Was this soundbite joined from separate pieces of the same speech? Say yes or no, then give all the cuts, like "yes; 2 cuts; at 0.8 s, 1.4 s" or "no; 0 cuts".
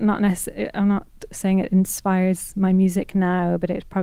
no; 0 cuts